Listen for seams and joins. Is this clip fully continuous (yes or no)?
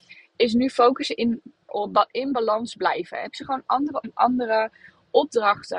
no